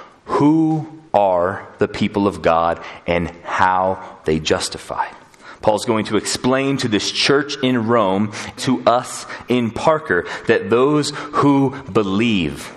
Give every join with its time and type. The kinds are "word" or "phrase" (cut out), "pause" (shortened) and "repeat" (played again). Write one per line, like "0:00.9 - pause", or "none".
0:01.1 - pause
0:04.2 - word
0:08.6 - word